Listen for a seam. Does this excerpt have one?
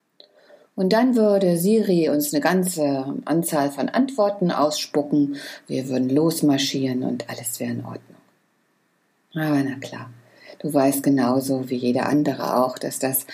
no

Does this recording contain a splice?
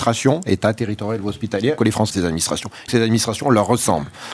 yes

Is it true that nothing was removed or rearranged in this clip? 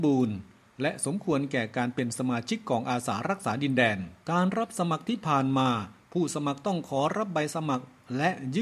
no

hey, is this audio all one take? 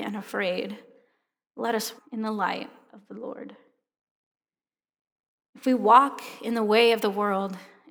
no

